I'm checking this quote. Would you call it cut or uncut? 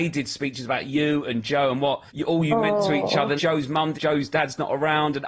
cut